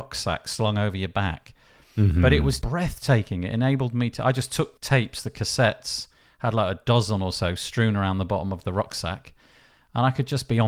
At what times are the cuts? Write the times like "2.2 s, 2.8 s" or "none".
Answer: 2.6 s, 4.8 s